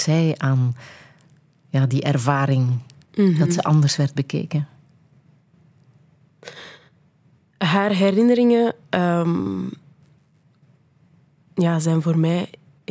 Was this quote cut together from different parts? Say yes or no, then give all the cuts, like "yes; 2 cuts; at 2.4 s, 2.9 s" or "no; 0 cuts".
no; 0 cuts